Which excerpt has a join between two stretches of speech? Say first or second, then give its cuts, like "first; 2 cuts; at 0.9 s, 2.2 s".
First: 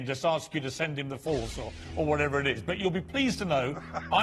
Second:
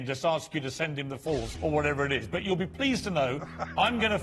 second; 1 cut; at 1.5 s